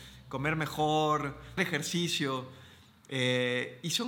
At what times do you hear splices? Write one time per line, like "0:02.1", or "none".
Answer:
0:01.6